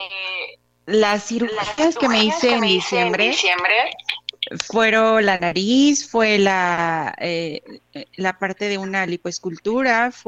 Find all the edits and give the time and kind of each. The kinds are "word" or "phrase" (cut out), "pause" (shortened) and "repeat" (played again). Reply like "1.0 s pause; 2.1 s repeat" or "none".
none

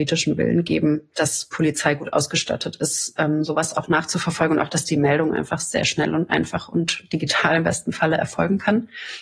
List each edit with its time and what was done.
none

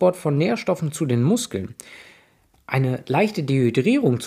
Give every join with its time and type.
none

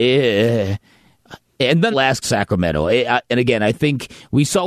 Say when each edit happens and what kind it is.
1.9 s phrase; 2.2 s phrase

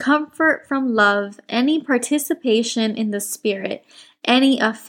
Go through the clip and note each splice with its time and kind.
none

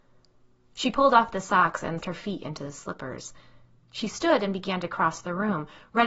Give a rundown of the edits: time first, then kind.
2.0 s word

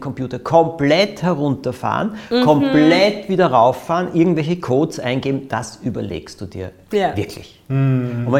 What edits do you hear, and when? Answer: none

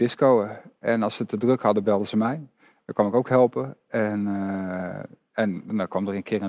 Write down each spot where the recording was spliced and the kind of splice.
none

